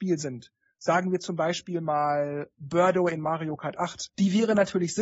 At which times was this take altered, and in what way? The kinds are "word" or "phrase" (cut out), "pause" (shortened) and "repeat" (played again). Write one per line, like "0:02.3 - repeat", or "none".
none